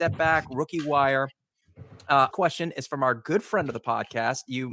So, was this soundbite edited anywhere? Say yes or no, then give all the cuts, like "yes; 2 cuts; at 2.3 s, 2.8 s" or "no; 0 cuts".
yes; 1 cut; at 2.3 s